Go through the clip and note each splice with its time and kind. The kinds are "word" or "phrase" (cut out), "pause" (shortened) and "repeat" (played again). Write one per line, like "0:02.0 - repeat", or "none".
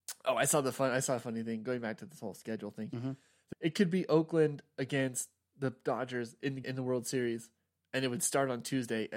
0:03.5 - word
0:06.6 - word

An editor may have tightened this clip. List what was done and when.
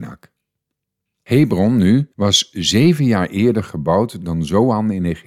0:02.1 - pause

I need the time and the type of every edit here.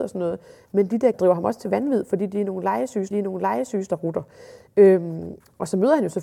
0:01.1 - word
0:03.1 - repeat

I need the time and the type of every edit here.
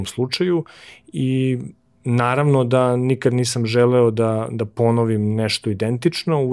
none

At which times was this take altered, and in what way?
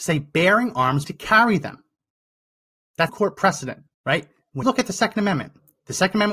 0:01.0 - word
0:03.1 - word
0:03.9 - pause
0:04.6 - word

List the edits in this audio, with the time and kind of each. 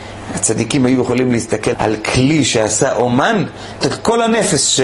0:01.7 - word
0:03.8 - word

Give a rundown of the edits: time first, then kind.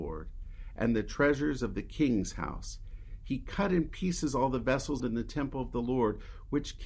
0:05.0 - phrase

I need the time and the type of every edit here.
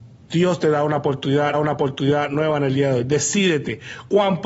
0:01.5 - repeat

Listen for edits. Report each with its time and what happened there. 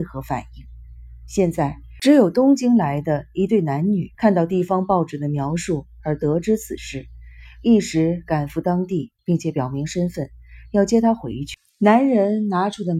0:04.1 - pause

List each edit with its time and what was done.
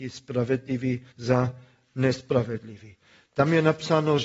0:01.1 - pause

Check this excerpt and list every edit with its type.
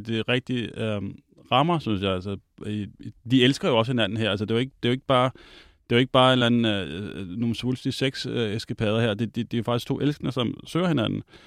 none

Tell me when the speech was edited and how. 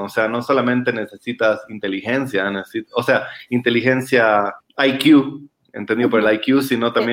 0:04.6 - pause

